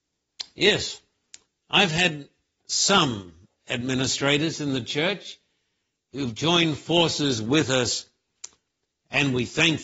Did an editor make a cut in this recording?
no; 0 cuts

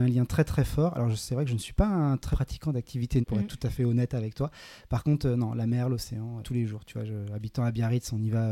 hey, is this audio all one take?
no; 3 cuts; at 2.3 s, 3.2 s, 6.4 s

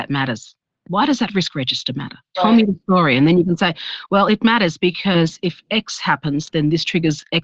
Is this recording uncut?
yes; 0 cuts

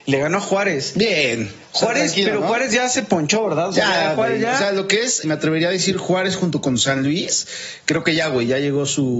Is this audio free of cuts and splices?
no; 1 cut; at 5.2 s

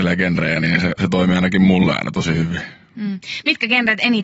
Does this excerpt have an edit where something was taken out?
no; 0 cuts

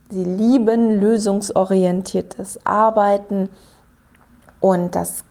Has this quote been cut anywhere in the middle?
no; 0 cuts

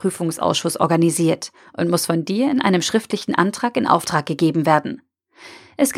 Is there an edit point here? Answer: no; 0 cuts

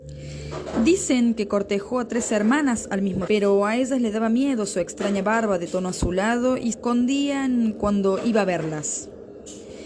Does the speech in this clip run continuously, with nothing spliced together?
no; 2 cuts; at 3.3 s, 6.7 s

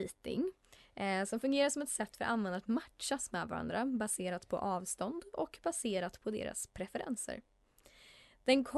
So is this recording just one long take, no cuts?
yes; 0 cuts

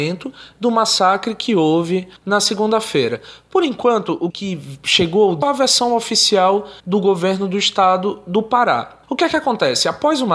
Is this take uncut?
no; 5 cuts; at 2.2 s, 4.3 s, 5.4 s, 6.8 s, 9.0 s

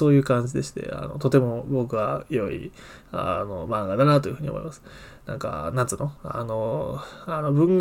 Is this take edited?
no; 0 cuts

